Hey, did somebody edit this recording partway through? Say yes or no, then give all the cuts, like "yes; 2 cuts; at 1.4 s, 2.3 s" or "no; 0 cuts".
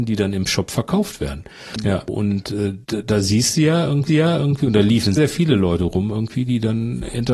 yes; 3 cuts; at 2.1 s, 4.1 s, 5.2 s